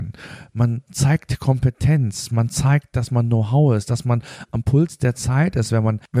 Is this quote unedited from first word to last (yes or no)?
yes